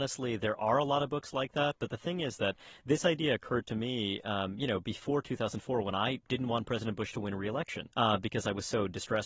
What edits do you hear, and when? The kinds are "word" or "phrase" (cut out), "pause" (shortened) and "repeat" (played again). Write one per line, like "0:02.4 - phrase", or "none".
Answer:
0:07.9 - pause